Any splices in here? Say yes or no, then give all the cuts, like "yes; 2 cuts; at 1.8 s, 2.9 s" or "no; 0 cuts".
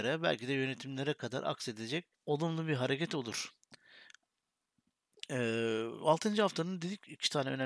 yes; 1 cut; at 2.1 s